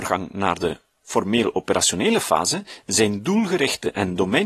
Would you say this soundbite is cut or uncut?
uncut